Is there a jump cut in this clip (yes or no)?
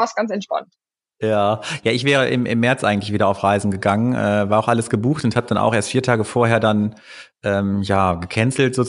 no